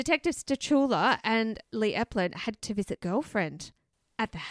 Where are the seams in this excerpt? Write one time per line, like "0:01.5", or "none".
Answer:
0:01.6
0:02.6
0:03.0